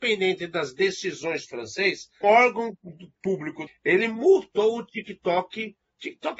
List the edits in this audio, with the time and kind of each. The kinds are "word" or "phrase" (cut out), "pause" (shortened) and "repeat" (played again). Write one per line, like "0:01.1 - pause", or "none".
0:01.5 - phrase
0:02.2 - word
0:03.7 - phrase